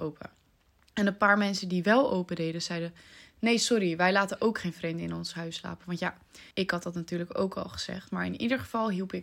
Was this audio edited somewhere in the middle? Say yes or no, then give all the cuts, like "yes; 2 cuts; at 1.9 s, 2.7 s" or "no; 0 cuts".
yes; 1 cut; at 6.5 s